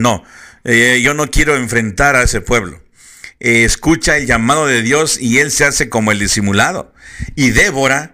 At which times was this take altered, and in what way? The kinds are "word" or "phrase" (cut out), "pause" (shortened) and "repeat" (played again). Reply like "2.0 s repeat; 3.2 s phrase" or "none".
none